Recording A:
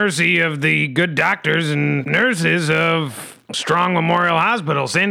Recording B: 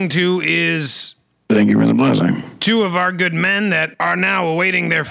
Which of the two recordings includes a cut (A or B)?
A